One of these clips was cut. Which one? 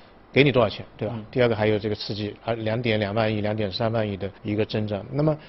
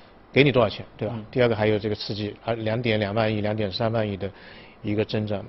first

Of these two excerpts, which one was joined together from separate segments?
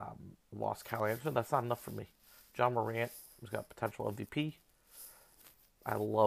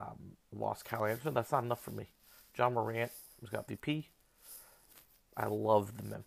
second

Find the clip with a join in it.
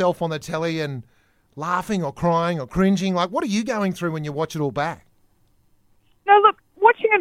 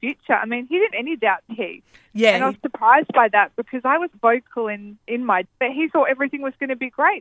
second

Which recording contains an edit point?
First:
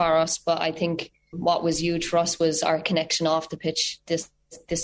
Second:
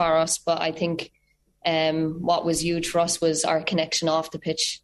first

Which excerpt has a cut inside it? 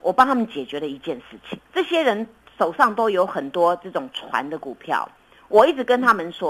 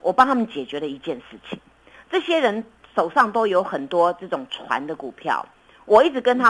first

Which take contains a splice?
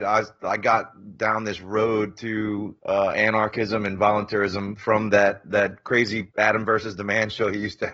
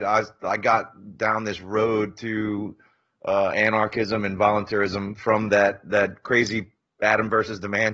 first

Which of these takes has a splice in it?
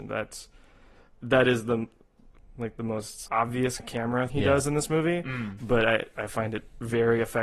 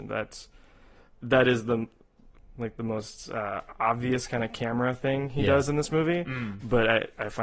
first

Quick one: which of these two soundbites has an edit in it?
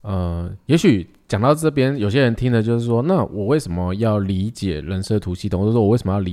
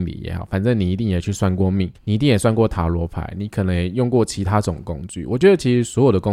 second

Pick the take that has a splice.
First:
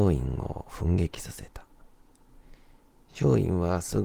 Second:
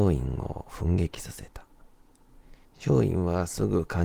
second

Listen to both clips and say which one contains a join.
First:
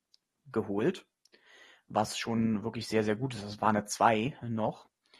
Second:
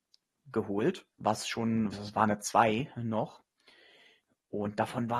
second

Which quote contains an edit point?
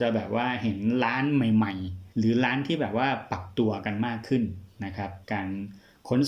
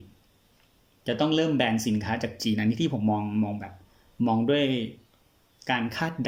first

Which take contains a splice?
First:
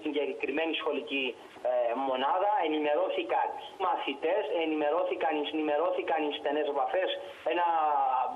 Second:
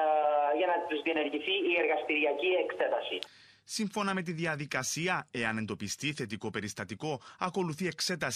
first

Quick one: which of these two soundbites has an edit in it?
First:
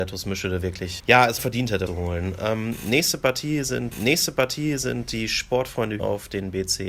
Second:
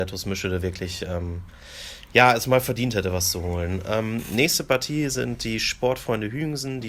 first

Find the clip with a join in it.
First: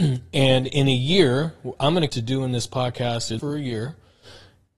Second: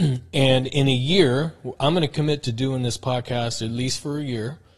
first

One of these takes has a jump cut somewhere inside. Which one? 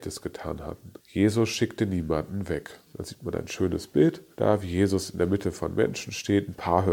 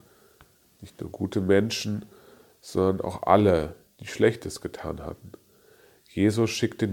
first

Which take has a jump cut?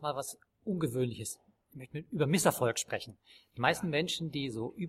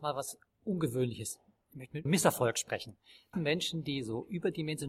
second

